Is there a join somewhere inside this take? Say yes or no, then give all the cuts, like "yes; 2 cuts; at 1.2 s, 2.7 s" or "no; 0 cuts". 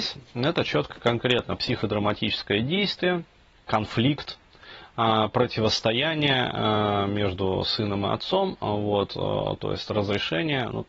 yes; 1 cut; at 3.6 s